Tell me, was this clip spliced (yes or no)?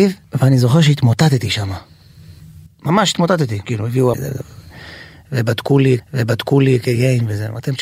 yes